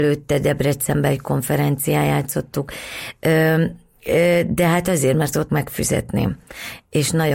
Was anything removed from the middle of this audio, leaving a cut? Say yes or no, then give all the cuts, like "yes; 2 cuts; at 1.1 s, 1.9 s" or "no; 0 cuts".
yes; 1 cut; at 5.5 s